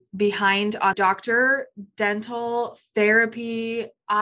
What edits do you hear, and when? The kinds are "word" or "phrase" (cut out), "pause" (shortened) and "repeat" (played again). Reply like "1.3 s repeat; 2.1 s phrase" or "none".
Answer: 0.9 s word